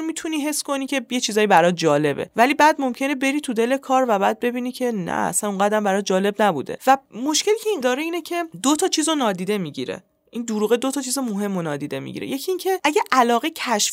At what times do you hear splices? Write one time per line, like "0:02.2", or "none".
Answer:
0:07.8